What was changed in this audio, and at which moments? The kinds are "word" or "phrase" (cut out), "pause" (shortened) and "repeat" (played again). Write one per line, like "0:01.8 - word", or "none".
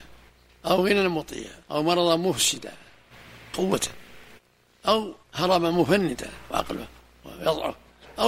0:01.6 - pause
0:03.5 - word
0:05.2 - pause
0:06.5 - word